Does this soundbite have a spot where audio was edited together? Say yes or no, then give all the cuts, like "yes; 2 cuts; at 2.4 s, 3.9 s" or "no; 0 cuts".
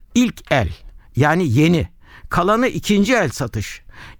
no; 0 cuts